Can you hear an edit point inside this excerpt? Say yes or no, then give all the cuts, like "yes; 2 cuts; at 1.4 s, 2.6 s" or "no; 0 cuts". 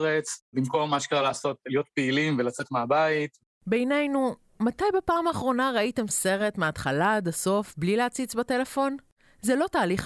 no; 0 cuts